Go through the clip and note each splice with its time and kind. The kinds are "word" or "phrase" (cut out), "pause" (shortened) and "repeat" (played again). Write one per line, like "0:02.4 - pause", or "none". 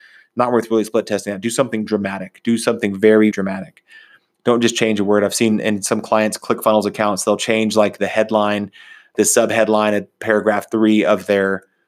0:03.3 - word
0:09.1 - word